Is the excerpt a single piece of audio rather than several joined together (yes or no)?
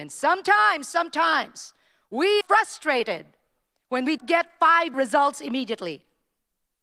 no